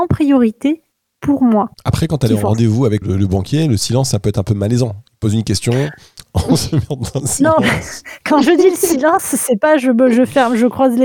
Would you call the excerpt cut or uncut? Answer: cut